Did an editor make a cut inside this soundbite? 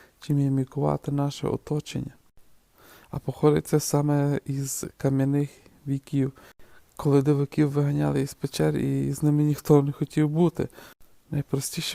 no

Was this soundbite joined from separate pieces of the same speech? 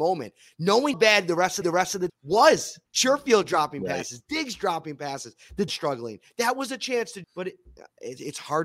yes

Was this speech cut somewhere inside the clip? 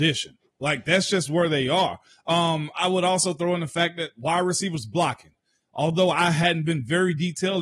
no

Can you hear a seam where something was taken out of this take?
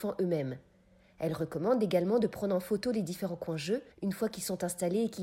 yes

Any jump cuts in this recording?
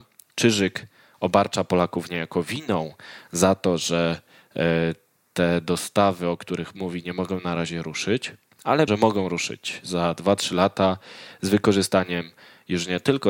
yes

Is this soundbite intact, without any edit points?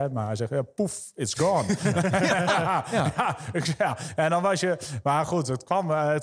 yes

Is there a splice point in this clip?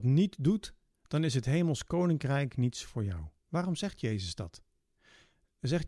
yes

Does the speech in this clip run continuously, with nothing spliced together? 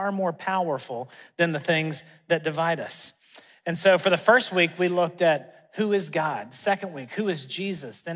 yes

